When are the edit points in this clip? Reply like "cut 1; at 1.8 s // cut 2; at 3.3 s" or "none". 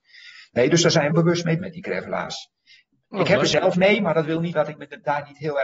cut 1; at 1.1 s // cut 2; at 1.6 s // cut 3; at 3.7 s // cut 4; at 4.5 s